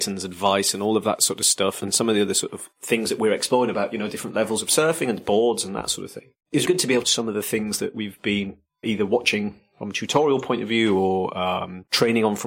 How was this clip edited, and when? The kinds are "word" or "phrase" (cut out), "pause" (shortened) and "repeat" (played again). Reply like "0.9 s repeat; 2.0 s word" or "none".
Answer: 6.6 s word; 7.0 s phrase; 8.8 s word